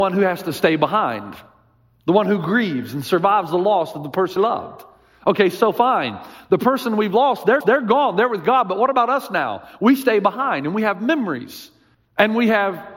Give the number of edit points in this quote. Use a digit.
3